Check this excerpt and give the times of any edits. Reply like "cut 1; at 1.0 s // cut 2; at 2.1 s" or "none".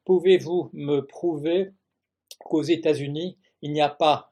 none